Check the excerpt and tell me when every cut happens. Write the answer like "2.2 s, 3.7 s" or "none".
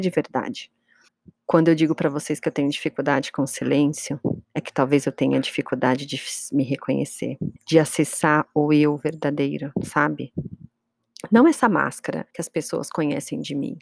1.1 s, 4.4 s, 7.6 s, 12.3 s